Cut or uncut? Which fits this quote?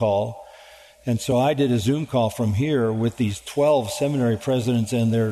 uncut